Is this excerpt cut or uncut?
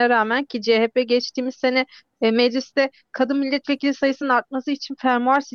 uncut